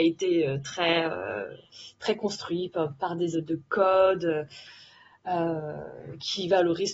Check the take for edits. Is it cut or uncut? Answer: cut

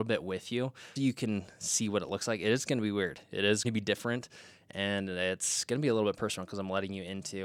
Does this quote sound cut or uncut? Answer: cut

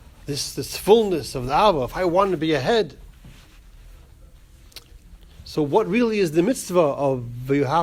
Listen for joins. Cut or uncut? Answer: uncut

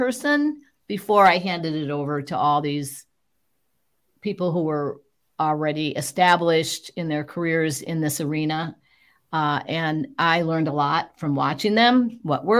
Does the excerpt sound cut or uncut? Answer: uncut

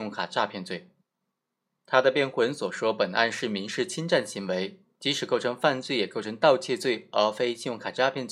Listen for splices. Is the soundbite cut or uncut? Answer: uncut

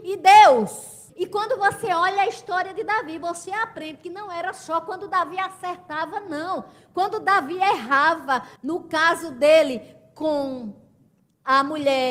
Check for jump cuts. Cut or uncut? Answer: cut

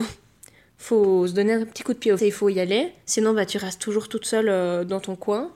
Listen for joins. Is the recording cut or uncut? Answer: cut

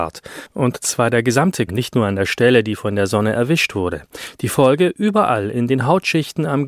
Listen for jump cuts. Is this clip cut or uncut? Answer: cut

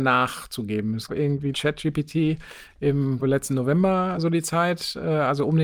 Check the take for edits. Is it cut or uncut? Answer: cut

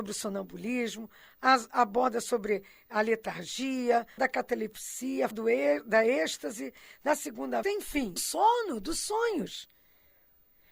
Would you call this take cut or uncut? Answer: cut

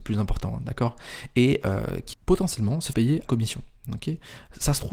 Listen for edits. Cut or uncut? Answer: cut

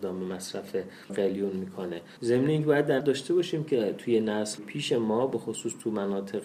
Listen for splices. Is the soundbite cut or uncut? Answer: cut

